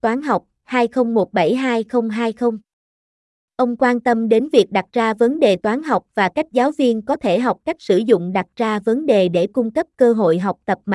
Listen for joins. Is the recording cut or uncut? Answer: uncut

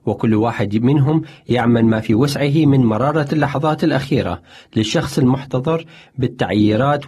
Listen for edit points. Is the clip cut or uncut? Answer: uncut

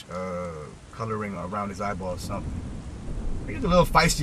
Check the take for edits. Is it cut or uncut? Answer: uncut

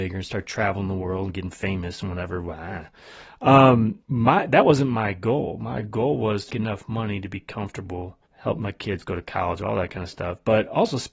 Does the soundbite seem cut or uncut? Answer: cut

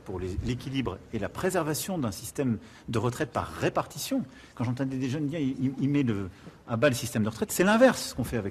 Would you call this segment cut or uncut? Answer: uncut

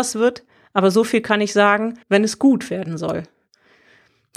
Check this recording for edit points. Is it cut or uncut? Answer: cut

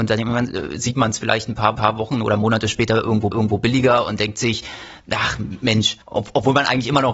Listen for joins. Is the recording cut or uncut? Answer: cut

